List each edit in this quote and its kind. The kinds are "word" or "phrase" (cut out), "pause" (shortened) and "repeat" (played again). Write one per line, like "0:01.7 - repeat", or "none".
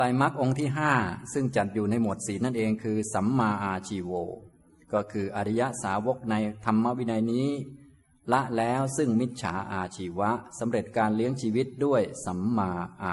none